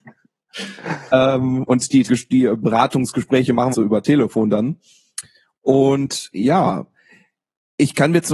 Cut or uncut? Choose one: cut